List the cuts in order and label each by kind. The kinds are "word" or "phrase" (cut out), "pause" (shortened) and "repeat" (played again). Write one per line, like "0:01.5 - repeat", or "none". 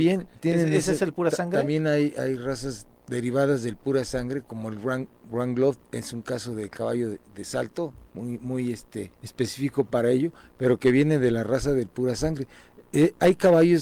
0:08.1 - pause
0:09.1 - pause